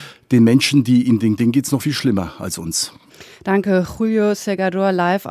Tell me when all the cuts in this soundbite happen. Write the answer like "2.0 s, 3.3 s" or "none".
1.4 s, 1.8 s